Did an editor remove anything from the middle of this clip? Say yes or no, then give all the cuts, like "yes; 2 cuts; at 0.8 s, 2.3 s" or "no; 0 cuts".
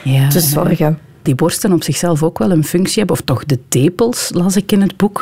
yes; 2 cuts; at 1.3 s, 3.2 s